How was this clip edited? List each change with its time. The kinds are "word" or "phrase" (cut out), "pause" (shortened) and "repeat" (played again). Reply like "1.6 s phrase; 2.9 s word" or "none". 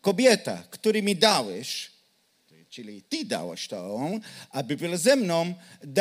none